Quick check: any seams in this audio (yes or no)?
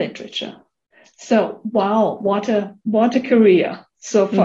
no